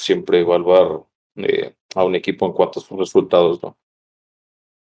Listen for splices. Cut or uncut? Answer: uncut